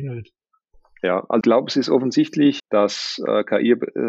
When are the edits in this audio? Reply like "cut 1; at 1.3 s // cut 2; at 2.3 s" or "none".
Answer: cut 1; at 1.4 s // cut 2; at 2.6 s